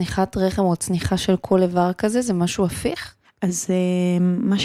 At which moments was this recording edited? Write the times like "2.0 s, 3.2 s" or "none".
3.3 s